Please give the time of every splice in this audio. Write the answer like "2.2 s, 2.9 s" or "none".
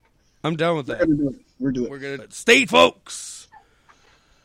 1.7 s, 2.2 s, 2.7 s

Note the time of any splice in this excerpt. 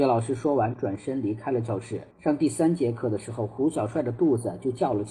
2.1 s

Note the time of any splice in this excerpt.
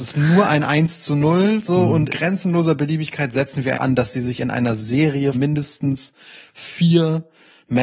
2.1 s, 3.7 s, 5.3 s

